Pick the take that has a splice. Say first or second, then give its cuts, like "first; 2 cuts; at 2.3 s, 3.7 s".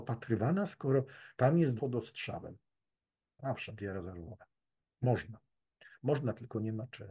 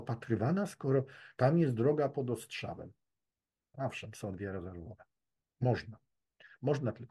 first; 2 cuts; at 1.8 s, 3.8 s